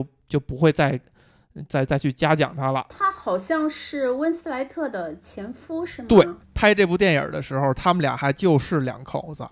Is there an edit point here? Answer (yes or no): yes